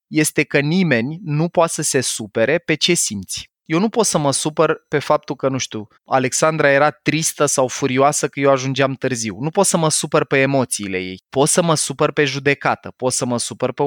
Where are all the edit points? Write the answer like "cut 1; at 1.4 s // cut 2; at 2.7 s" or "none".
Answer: cut 1; at 3.5 s // cut 2; at 5.9 s // cut 3; at 11.2 s

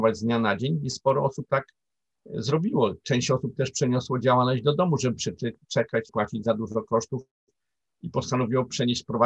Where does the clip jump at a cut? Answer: cut 1; at 6.1 s

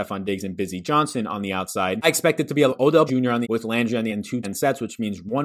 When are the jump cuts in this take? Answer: cut 1; at 2.7 s // cut 2; at 3.1 s // cut 3; at 3.4 s // cut 4; at 4.1 s // cut 5; at 4.4 s

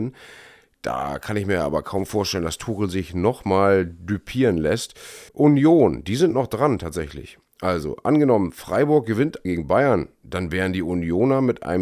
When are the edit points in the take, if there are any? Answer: cut 1; at 5.3 s // cut 2; at 9.4 s

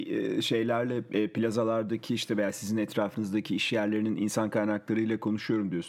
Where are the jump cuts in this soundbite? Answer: none

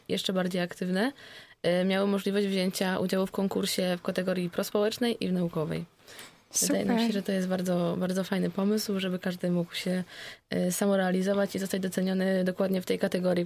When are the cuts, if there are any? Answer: none

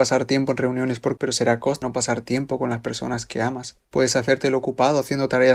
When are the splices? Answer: cut 1; at 1.2 s // cut 2; at 1.8 s // cut 3; at 3.8 s

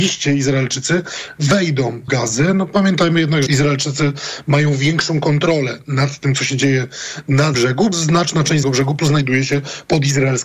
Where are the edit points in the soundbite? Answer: cut 1; at 2.1 s // cut 2; at 3.5 s // cut 3; at 7.5 s // cut 4; at 7.9 s // cut 5; at 8.6 s // cut 6; at 9.0 s

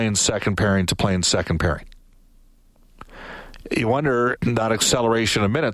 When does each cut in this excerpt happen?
cut 1; at 4.4 s

